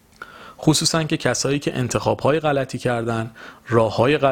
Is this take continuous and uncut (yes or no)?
yes